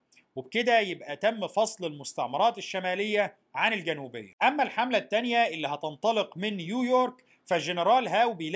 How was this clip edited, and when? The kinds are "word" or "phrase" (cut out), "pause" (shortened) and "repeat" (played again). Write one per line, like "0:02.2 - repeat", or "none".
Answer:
none